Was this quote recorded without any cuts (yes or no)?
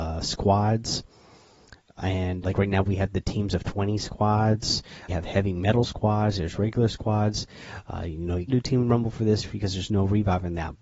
no